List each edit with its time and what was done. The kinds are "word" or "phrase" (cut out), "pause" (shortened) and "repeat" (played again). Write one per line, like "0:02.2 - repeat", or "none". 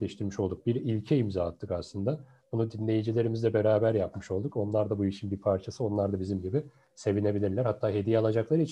none